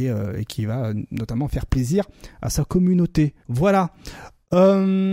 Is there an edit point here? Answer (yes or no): yes